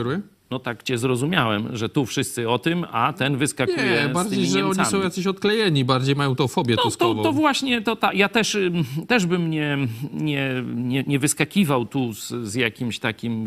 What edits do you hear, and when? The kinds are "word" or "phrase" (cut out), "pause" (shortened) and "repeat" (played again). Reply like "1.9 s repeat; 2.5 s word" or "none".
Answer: none